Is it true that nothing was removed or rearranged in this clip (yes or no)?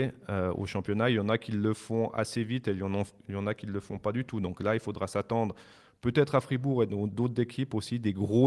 yes